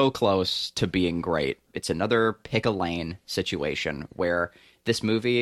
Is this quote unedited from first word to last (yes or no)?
yes